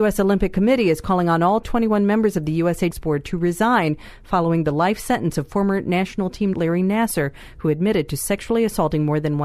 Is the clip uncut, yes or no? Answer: no